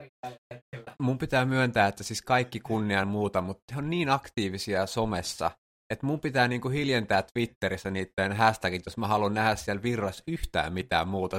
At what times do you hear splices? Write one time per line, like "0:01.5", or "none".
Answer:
0:03.0